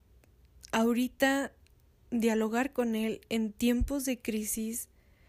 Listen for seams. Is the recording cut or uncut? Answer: uncut